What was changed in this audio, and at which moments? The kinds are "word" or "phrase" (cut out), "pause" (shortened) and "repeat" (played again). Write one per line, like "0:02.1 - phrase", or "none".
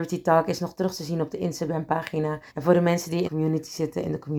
0:02.5 - pause
0:03.2 - word